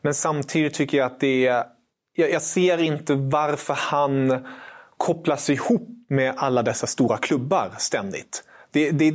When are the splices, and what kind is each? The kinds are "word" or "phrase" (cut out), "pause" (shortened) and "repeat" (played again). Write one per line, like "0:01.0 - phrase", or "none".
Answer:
none